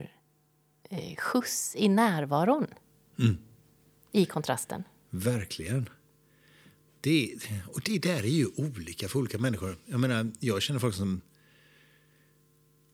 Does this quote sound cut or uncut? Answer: uncut